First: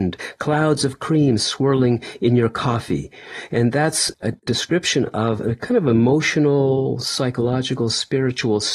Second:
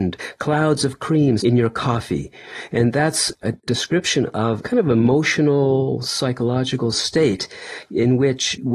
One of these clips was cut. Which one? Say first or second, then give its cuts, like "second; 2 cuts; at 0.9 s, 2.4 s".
second; 3 cuts; at 1.4 s, 4.6 s, 6.9 s